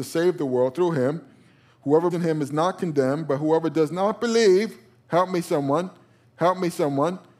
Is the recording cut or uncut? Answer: cut